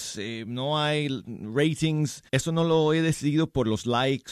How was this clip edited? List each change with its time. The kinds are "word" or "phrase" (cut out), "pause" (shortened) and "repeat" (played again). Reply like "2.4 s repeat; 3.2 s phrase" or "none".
2.3 s pause